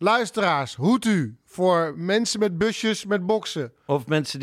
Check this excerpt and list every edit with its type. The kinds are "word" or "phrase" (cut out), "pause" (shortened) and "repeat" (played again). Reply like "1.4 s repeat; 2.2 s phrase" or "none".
none